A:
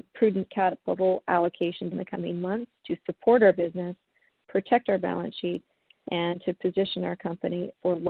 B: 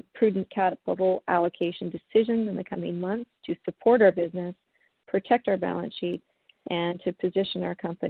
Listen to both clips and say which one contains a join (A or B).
A